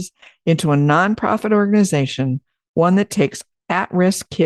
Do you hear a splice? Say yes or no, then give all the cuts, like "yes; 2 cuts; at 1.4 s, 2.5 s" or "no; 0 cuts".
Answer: no; 0 cuts